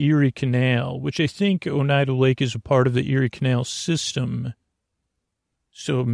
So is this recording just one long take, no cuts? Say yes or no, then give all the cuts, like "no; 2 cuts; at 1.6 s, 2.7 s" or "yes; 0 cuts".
yes; 0 cuts